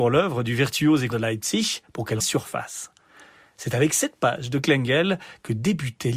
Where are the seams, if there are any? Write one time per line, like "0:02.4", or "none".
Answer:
0:01.1
0:02.2